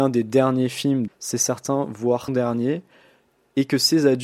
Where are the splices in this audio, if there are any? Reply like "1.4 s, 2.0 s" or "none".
1.1 s, 2.3 s

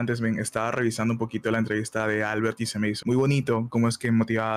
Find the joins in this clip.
3.0 s

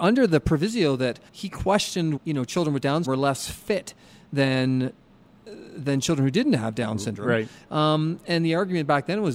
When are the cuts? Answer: 1.3 s, 2.2 s, 3.0 s

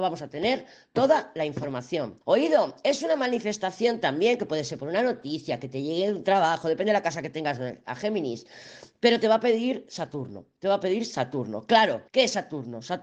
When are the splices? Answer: 2.2 s, 12.1 s

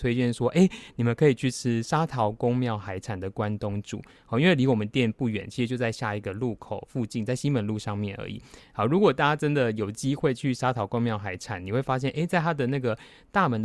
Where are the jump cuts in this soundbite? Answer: none

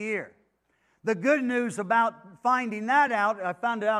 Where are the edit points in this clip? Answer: none

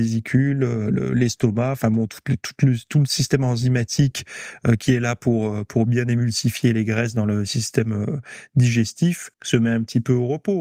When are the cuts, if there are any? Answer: 9.3 s

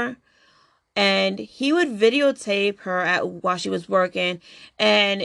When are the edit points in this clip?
none

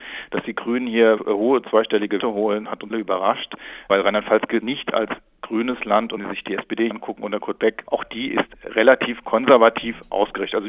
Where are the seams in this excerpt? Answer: 1.2 s, 2.2 s, 2.9 s, 4.6 s, 6.2 s, 6.9 s

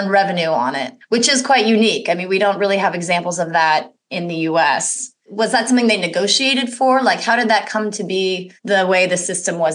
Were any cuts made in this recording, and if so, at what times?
none

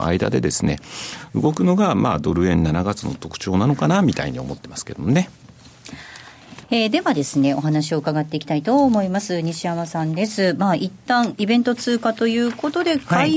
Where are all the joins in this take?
6.6 s

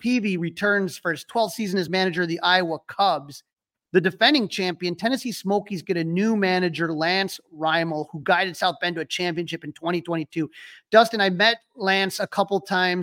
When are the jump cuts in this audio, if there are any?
none

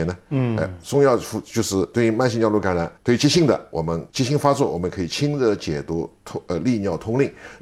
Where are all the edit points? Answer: 3.0 s, 4.1 s

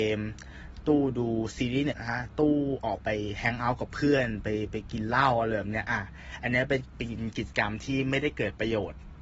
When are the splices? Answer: 1.9 s

